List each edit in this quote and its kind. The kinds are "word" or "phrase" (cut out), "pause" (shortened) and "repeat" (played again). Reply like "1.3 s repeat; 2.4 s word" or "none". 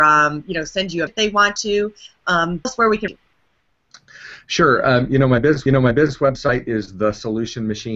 1.1 s word; 2.6 s word; 3.1 s word; 5.7 s repeat